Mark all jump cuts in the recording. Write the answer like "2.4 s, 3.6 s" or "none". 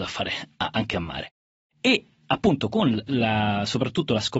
none